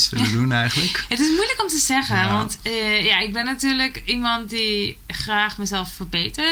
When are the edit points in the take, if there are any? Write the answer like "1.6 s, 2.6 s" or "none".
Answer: none